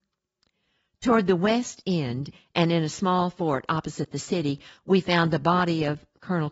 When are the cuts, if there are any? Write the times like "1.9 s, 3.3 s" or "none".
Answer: none